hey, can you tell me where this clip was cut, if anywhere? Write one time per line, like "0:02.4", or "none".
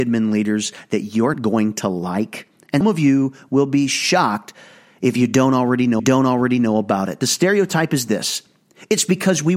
0:01.3
0:02.8
0:06.0